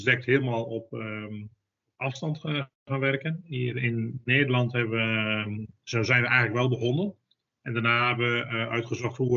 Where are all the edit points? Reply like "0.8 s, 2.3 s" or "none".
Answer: none